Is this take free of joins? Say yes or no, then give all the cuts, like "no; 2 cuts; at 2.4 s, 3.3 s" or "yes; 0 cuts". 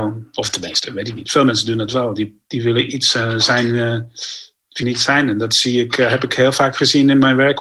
no; 2 cuts; at 2.5 s, 4.8 s